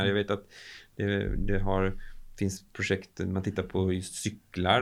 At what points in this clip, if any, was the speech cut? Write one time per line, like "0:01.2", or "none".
none